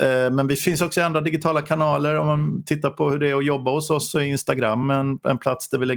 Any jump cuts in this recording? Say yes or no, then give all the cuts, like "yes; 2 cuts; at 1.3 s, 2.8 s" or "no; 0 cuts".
no; 0 cuts